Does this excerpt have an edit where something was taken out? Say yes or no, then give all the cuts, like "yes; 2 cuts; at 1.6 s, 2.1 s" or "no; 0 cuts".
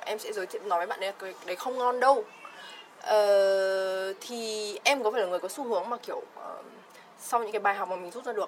no; 0 cuts